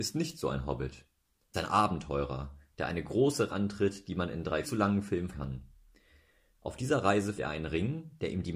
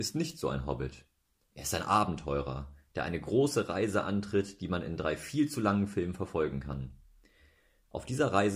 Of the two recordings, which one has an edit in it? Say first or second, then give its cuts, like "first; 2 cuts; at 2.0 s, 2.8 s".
first; 5 cuts; at 1.5 s, 3.5 s, 4.6 s, 5.3 s, 7.4 s